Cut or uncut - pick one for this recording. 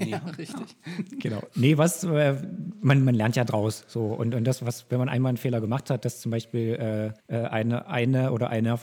cut